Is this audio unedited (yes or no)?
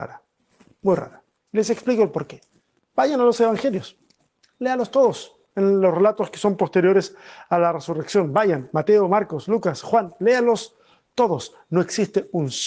yes